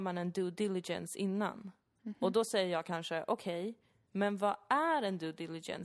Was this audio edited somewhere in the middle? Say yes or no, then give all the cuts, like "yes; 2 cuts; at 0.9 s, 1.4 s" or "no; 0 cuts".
no; 0 cuts